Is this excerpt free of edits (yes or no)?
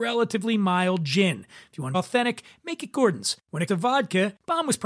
no